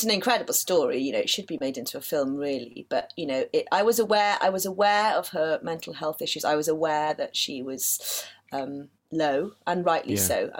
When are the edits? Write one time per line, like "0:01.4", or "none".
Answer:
0:09.0

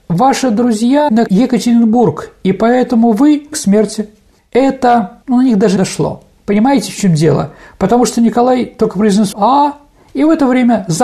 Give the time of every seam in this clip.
0:01.1
0:03.5
0:05.8
0:09.3

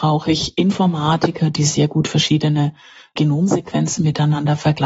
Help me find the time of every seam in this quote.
none

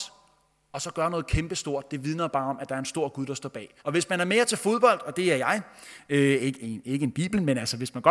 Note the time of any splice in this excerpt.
0:03.8

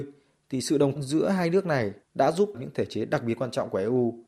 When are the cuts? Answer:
0:01.0
0:02.0
0:02.5

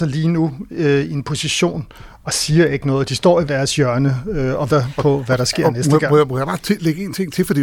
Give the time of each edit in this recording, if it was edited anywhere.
0:03.5
0:04.7

